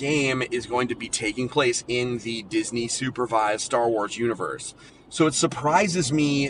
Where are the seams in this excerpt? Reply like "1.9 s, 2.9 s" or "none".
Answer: 4.9 s